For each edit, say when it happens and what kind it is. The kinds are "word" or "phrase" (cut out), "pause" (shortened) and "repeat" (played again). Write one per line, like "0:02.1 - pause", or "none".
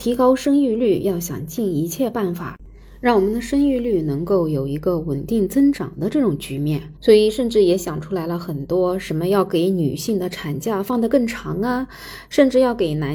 0:07.0 - pause